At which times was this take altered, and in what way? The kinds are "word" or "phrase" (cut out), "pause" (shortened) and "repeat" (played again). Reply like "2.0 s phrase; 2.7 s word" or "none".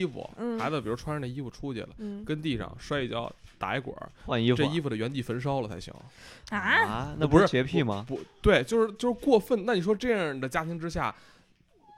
none